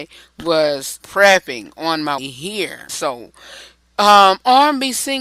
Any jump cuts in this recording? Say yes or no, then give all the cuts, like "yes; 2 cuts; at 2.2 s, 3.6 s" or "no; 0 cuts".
yes; 3 cuts; at 1.0 s, 2.2 s, 2.9 s